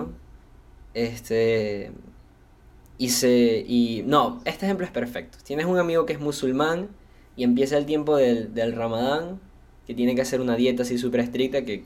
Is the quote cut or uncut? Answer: uncut